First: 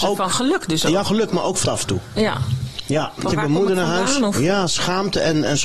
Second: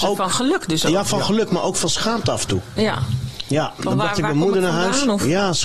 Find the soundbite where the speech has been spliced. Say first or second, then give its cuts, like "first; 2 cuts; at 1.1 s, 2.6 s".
first; 3 cuts; at 1.0 s, 1.6 s, 3.3 s